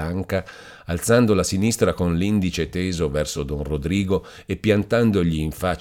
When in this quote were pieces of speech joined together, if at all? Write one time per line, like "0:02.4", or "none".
none